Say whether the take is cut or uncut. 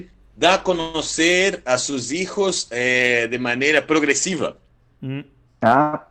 uncut